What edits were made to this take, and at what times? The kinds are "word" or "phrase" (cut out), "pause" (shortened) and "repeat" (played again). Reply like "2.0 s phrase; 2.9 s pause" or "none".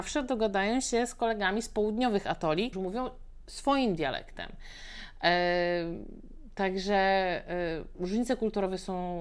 2.7 s word